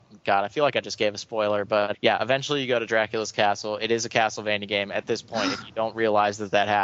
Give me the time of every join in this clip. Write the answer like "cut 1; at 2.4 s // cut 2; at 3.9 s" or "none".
cut 1; at 1.9 s